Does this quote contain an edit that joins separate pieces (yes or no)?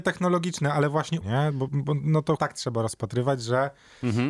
yes